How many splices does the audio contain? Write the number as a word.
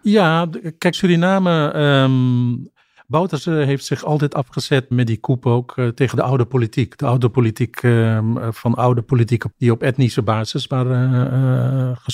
three